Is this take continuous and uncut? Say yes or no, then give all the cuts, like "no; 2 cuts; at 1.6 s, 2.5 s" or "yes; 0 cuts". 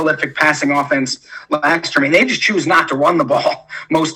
yes; 0 cuts